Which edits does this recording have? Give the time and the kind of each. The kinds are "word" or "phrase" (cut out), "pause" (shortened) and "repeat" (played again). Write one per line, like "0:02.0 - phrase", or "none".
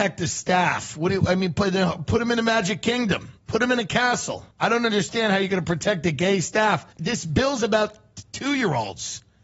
0:03.4 - pause
0:04.5 - pause
0:06.9 - pause